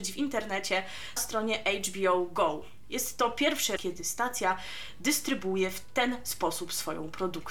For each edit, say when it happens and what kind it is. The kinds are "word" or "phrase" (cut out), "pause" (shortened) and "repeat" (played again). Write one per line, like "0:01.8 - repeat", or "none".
0:01.2 - word
0:03.8 - word